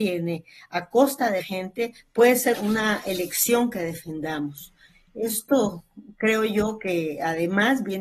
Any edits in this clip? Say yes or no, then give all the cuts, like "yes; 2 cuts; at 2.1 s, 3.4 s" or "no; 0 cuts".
yes; 2 cuts; at 1.4 s, 2.5 s